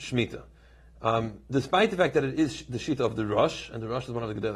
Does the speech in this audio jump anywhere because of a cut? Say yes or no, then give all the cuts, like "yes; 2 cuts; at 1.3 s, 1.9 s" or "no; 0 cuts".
no; 0 cuts